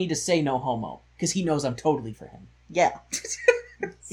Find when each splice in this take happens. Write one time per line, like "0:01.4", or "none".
0:02.1